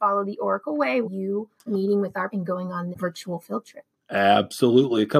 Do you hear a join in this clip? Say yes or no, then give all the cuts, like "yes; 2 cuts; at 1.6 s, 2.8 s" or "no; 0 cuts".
yes; 4 cuts; at 1.0 s, 1.7 s, 2.3 s, 2.9 s